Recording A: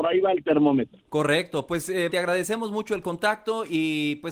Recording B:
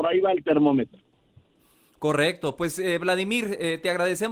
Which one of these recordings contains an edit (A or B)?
A